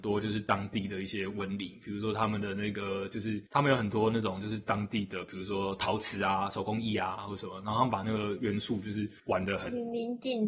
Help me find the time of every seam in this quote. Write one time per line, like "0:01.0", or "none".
0:03.5
0:09.2